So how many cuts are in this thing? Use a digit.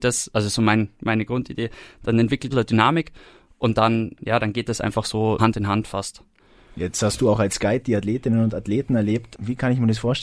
2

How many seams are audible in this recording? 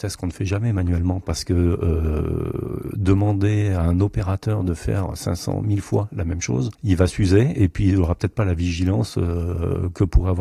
0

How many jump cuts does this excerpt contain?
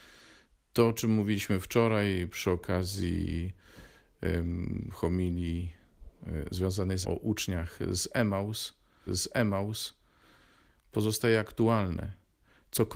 2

